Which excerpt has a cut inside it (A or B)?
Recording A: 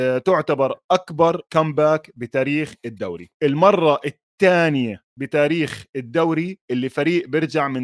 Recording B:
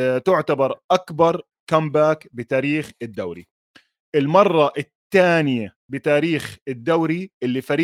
A